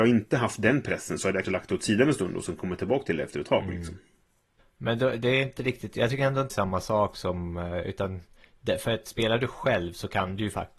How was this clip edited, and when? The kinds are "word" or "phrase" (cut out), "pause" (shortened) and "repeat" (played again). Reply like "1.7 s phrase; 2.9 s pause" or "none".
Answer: 1.4 s word; 6.5 s word